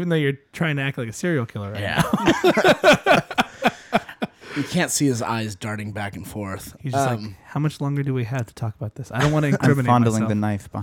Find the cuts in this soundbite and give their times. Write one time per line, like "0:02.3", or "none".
none